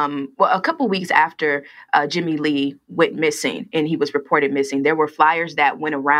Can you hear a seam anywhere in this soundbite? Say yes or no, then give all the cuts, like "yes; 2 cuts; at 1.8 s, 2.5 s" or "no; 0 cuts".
no; 0 cuts